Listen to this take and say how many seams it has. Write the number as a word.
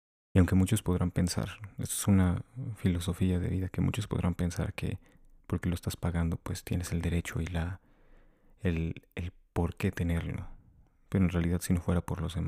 zero